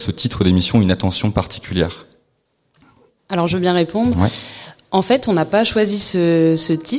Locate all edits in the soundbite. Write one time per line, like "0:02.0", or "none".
0:02.8